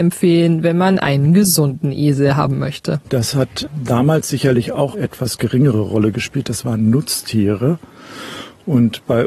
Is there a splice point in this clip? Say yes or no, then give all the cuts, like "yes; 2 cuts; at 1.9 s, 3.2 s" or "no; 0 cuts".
yes; 1 cut; at 4.9 s